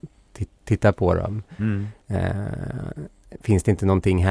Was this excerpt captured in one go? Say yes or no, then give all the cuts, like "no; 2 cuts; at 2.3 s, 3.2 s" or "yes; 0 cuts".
no; 1 cut; at 2.0 s